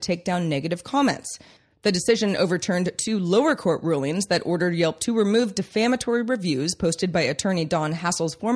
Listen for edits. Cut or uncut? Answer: uncut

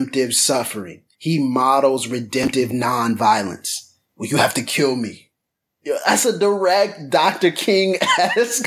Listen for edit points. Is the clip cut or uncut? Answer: cut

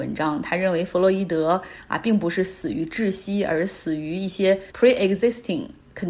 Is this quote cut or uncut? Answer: cut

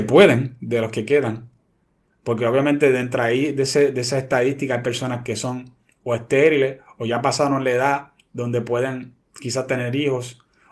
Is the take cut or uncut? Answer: uncut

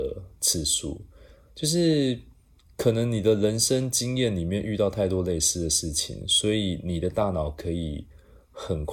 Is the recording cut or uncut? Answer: uncut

